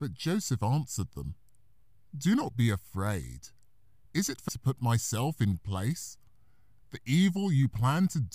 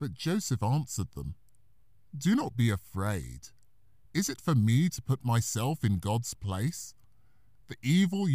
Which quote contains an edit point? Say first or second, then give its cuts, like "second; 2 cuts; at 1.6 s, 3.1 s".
first; 2 cuts; at 4.5 s, 5.6 s